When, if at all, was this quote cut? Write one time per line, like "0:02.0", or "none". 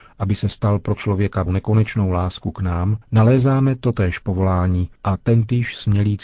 0:01.0
0:01.5
0:03.0
0:05.0